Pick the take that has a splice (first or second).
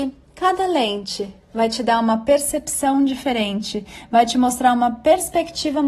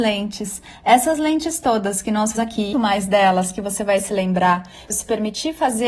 second